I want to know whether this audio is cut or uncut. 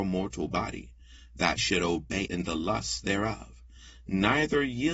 cut